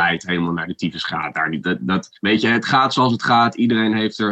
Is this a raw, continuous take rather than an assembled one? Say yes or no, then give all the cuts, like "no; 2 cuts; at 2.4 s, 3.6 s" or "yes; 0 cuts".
no; 2 cuts; at 1.6 s, 2.2 s